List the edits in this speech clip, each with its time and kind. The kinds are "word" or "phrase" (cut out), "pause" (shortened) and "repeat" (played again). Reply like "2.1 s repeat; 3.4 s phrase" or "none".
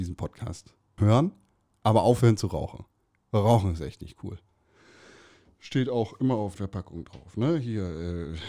1.0 s word; 6.6 s word